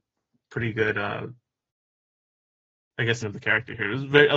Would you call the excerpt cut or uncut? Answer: cut